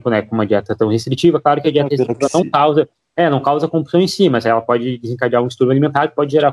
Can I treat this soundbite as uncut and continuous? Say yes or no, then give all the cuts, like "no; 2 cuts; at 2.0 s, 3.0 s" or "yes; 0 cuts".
yes; 0 cuts